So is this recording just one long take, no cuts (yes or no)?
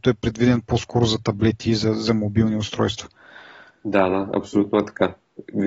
yes